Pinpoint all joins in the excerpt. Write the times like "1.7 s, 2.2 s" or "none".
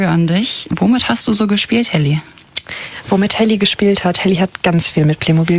none